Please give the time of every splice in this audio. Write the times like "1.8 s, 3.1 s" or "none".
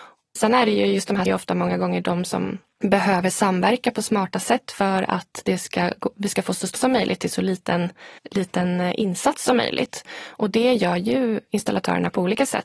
1.3 s, 6.8 s, 8.2 s